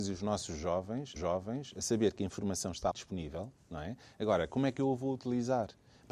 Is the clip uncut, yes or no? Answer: no